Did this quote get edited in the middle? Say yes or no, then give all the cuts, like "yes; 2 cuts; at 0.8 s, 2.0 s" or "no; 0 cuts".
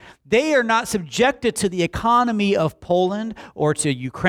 no; 0 cuts